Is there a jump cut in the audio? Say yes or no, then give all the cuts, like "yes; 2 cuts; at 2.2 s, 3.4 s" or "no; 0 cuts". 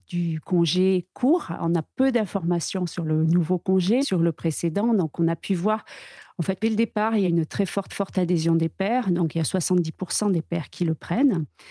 yes; 5 cuts; at 1.9 s, 4.0 s, 6.6 s, 7.2 s, 7.9 s